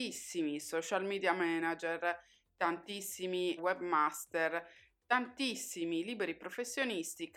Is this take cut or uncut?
cut